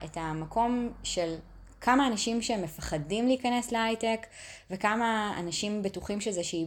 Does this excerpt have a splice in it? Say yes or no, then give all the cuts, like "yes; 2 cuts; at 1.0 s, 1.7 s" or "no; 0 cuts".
no; 0 cuts